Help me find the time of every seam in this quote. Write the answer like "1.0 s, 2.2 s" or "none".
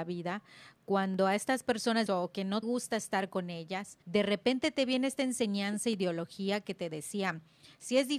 2.1 s, 2.6 s, 4.0 s